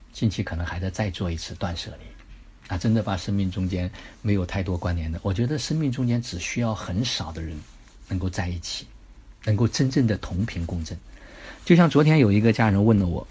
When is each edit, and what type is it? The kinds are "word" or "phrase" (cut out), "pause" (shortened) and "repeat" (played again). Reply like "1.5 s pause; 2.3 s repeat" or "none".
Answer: none